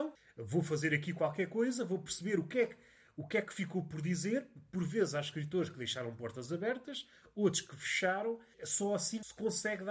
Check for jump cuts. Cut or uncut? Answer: uncut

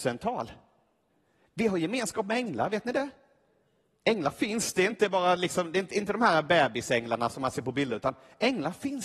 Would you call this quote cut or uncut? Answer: uncut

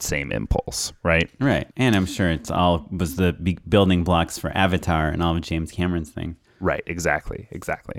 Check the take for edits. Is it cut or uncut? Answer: cut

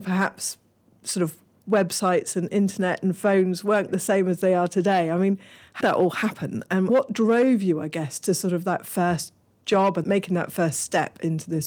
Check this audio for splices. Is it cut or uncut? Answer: cut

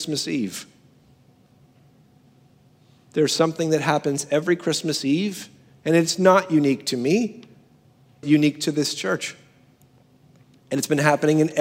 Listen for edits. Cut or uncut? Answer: cut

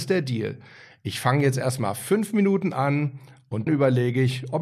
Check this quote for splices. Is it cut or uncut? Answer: cut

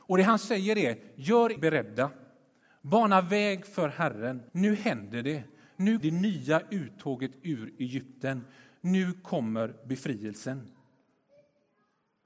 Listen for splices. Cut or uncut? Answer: cut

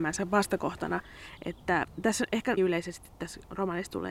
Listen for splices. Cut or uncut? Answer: cut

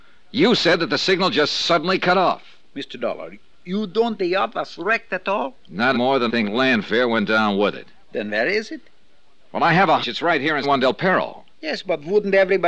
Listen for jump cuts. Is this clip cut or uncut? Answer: cut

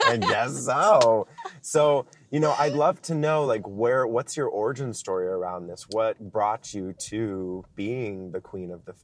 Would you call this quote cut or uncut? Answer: uncut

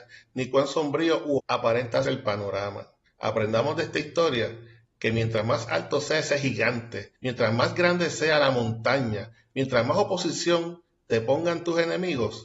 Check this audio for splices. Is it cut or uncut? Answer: cut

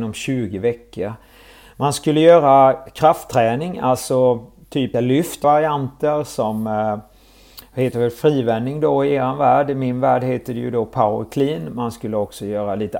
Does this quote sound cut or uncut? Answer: cut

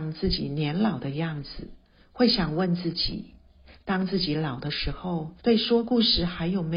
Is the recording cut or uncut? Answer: cut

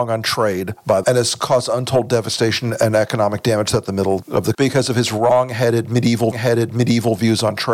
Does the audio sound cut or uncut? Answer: cut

